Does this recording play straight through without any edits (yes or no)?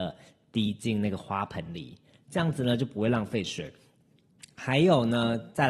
yes